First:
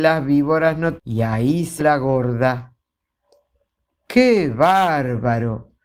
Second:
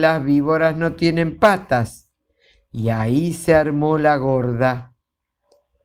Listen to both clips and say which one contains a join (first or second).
first